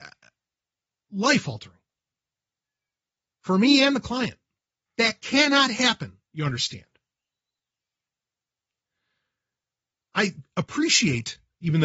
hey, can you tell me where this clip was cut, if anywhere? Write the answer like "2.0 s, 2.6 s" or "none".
4.5 s, 6.2 s